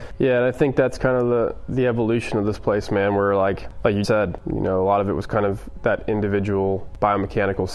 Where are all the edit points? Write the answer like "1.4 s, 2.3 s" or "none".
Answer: 4.0 s